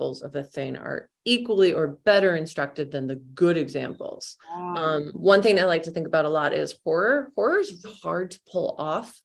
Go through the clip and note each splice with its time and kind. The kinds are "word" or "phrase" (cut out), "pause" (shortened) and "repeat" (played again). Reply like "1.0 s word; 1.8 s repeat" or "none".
4.4 s pause; 7.8 s word